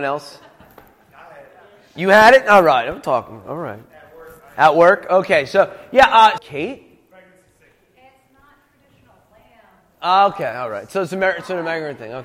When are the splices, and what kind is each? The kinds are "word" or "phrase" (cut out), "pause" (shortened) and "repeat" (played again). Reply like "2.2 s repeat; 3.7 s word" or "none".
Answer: 6.4 s word